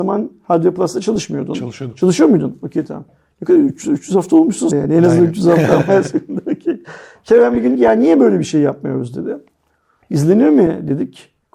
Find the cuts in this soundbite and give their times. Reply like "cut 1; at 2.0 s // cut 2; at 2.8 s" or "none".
cut 1; at 3.8 s // cut 2; at 4.7 s // cut 3; at 7.7 s